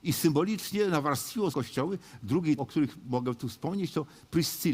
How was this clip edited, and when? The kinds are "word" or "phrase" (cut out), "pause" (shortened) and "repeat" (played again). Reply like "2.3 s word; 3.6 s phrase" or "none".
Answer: 1.5 s word; 2.6 s word